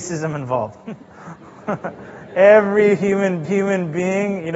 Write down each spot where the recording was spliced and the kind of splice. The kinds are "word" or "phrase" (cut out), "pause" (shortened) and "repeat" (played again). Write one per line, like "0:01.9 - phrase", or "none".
0:03.4 - repeat

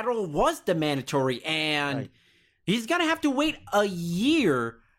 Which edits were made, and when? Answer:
none

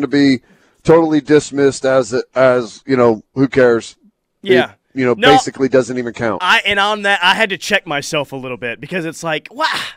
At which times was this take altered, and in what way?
0:03.2 - pause

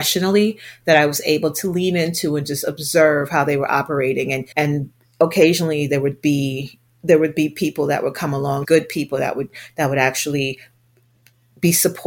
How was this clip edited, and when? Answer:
0:04.5 - pause
0:08.6 - word

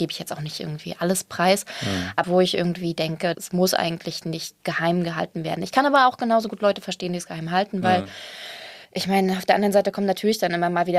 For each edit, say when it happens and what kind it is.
0:02.2 - phrase
0:03.3 - word
0:04.6 - pause
0:08.8 - pause

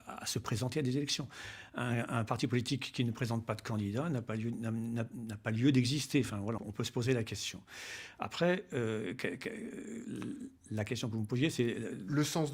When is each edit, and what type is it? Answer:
0:06.6 - word

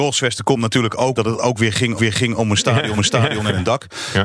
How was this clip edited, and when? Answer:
0:01.1 - phrase
0:02.0 - repeat
0:03.0 - repeat

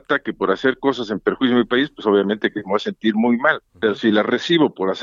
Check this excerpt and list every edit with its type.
0:03.7 - pause

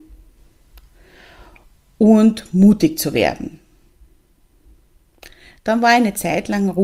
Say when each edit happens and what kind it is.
none

